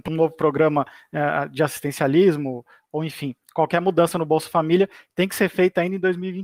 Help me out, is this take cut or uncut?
uncut